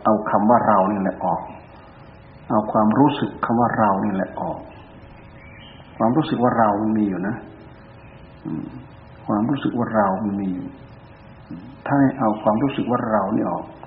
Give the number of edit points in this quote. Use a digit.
1